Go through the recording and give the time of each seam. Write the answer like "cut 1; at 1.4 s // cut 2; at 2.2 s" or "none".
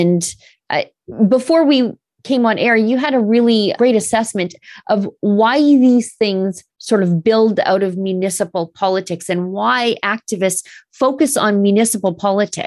cut 1; at 3.8 s

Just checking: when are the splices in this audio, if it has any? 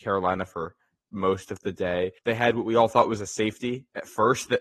cut 1; at 2.2 s

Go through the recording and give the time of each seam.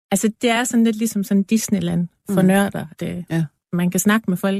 cut 1; at 2.9 s

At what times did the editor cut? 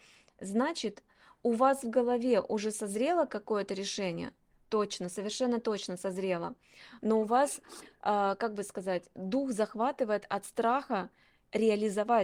none

